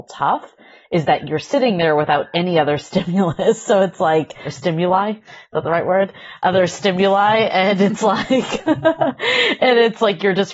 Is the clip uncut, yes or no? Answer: yes